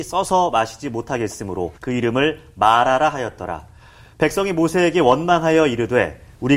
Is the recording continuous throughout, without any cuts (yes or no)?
no